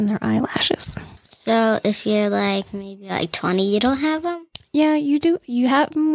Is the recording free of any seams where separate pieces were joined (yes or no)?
no